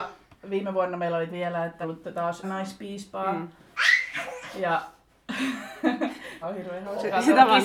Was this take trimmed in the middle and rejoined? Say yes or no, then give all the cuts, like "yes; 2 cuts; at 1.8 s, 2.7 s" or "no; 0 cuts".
yes; 4 cuts; at 1.3 s, 1.8 s, 2.4 s, 6.4 s